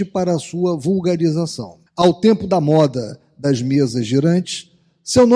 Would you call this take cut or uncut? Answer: cut